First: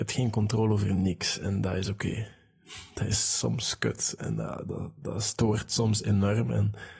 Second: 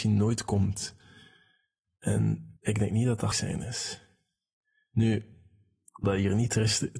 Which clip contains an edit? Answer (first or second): second